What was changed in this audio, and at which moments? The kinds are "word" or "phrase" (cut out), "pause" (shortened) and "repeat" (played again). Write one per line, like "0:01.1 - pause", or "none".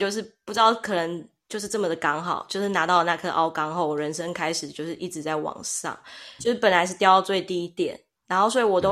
0:06.4 - word